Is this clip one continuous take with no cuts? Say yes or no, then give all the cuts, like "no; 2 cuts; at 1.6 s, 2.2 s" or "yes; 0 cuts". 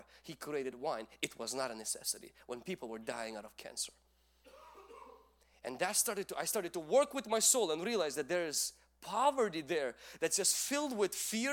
yes; 0 cuts